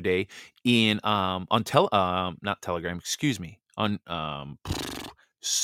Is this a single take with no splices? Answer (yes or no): yes